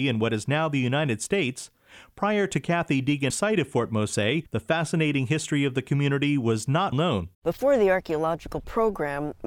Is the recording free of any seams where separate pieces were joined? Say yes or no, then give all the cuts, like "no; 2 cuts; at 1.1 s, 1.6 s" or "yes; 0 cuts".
no; 4 cuts; at 3.3 s, 4.5 s, 6.9 s, 7.3 s